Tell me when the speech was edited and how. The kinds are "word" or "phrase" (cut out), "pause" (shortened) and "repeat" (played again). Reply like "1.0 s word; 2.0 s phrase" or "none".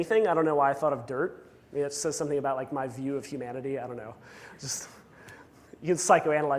none